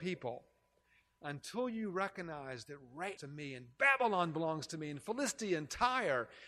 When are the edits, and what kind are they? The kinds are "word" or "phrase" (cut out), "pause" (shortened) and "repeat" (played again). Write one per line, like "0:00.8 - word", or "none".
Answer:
0:03.2 - phrase